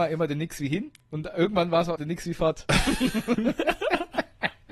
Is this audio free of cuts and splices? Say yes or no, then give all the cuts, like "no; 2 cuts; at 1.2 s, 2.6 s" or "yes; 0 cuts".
no; 1 cut; at 2.0 s